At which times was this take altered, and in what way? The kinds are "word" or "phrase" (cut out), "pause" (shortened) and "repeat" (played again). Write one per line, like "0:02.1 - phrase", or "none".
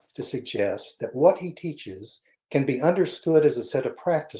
0:02.3 - pause